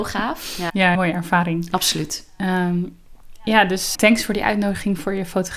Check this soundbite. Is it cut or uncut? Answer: cut